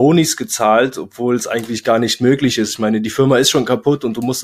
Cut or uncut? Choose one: uncut